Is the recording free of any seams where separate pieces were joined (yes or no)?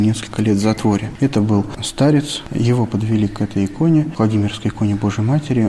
yes